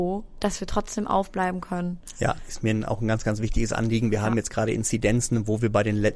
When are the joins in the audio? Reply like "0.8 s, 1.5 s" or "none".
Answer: none